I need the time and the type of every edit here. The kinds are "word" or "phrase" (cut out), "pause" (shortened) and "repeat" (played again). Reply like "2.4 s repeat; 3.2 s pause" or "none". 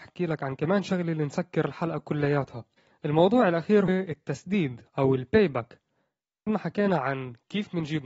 2.8 s pause; 3.9 s word; 6.5 s word